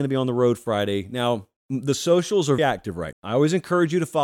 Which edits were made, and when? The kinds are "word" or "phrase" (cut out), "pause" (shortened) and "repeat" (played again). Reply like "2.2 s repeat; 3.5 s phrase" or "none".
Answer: 1.6 s pause; 2.6 s word; 3.1 s word